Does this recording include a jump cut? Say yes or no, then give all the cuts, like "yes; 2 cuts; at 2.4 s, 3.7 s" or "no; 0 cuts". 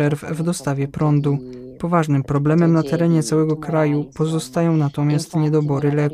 no; 0 cuts